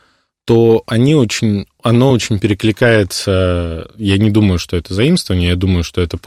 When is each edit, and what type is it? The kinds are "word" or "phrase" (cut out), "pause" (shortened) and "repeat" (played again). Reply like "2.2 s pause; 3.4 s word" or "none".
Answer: none